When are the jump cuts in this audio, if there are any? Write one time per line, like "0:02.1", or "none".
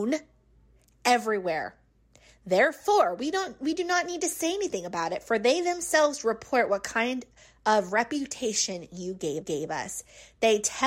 0:09.4